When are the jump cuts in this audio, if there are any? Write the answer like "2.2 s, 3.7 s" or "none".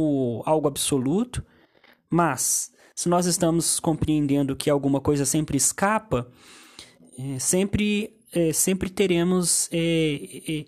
none